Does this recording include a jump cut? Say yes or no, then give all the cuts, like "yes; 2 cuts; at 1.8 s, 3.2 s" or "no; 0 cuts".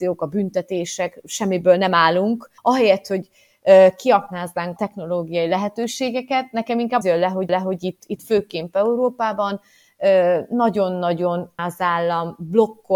yes; 5 cuts; at 2.6 s, 4.8 s, 7.0 s, 7.5 s, 11.6 s